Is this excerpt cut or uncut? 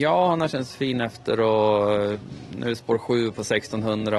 uncut